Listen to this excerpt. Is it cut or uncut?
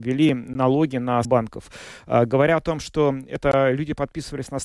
cut